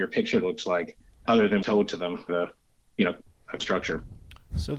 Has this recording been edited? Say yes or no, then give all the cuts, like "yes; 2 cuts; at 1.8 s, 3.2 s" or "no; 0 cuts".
yes; 4 cuts; at 1.3 s, 1.6 s, 2.3 s, 3.6 s